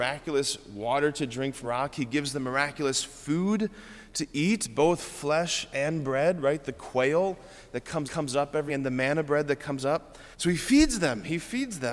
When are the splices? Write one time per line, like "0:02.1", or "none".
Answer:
0:01.6
0:08.1
0:08.7
0:10.3